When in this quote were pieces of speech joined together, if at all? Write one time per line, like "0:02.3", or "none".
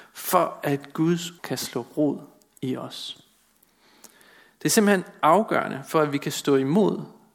0:01.4